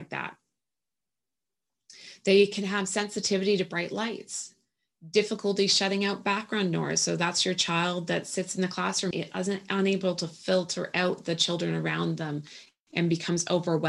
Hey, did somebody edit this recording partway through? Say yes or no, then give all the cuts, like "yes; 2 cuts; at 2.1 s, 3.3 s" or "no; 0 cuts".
yes; 1 cut; at 9.1 s